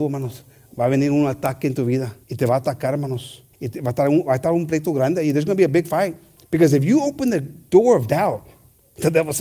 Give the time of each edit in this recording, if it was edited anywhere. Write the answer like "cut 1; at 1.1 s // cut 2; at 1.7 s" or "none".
cut 1; at 2.2 s // cut 2; at 3.5 s // cut 3; at 6.4 s